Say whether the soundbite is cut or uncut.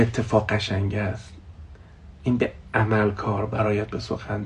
uncut